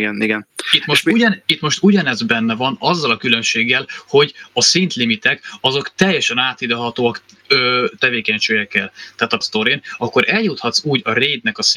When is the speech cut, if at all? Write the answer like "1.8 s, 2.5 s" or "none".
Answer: 8.0 s, 9.4 s